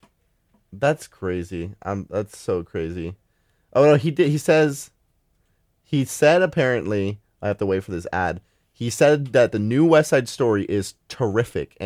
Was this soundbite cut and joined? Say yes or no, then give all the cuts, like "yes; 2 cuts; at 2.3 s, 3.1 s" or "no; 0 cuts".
no; 0 cuts